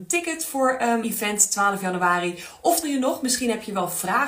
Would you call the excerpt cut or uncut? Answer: cut